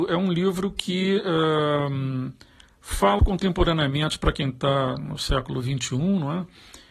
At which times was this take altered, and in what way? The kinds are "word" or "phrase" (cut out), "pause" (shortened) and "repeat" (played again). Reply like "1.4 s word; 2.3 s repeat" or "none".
3.2 s word